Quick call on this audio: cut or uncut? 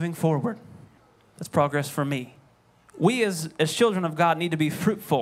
cut